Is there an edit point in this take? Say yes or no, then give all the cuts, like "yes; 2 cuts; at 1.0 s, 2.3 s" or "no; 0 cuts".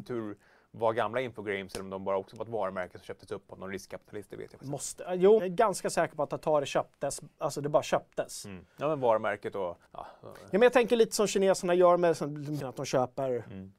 yes; 3 cuts; at 5.4 s, 9.9 s, 12.6 s